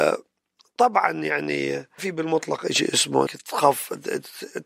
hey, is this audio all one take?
no; 2 cuts; at 2.0 s, 3.3 s

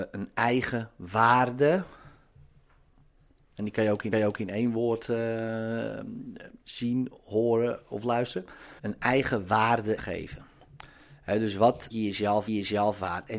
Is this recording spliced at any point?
yes; 6 cuts; at 4.1 s, 6.6 s, 8.8 s, 10.0 s, 11.9 s, 12.5 s

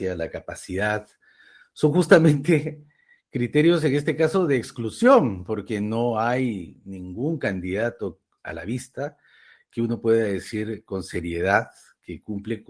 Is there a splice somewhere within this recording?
no; 0 cuts

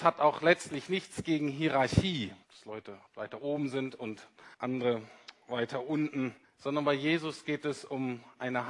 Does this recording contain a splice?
yes; 4 cuts; at 2.4 s, 3.1 s, 4.5 s, 6.4 s

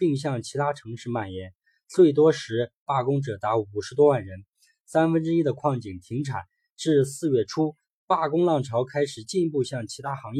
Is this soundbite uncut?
yes; 0 cuts

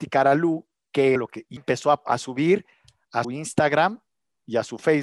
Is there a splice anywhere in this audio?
yes; 4 cuts; at 1.2 s, 1.6 s, 2.1 s, 3.2 s

